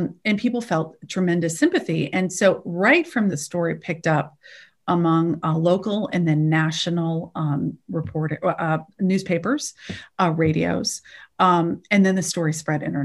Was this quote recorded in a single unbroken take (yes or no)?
no